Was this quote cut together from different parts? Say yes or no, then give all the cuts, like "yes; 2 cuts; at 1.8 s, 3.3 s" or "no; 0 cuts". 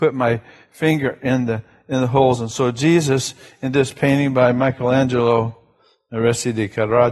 no; 0 cuts